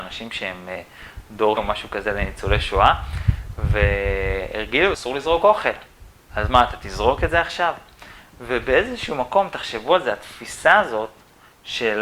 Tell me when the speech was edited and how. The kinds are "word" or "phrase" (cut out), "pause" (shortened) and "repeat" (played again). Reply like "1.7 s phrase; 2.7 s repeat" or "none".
1.6 s word; 4.9 s word